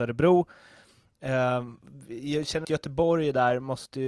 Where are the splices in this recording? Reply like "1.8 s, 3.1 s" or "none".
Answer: 2.6 s